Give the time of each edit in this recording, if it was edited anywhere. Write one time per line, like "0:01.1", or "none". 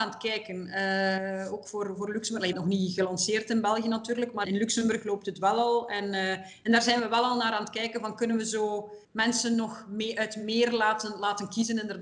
0:02.5
0:04.4
0:09.0